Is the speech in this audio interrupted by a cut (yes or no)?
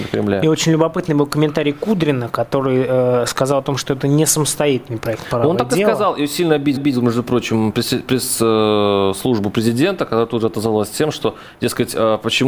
yes